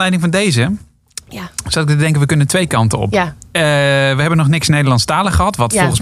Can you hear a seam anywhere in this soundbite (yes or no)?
no